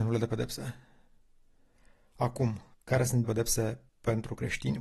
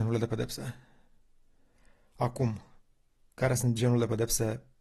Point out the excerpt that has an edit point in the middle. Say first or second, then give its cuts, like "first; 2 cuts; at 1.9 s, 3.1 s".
first; 3 cuts; at 2.7 s, 3.2 s, 3.9 s